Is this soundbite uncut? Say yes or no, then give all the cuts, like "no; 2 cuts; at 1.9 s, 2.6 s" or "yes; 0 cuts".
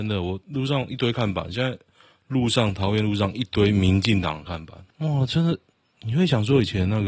no; 1 cut; at 4.9 s